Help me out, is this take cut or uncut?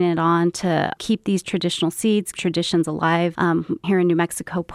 cut